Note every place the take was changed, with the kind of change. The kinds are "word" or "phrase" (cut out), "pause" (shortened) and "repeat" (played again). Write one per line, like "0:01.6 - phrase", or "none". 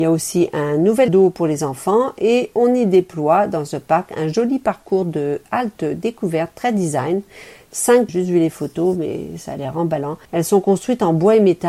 0:01.1 - phrase
0:08.1 - phrase
0:10.2 - pause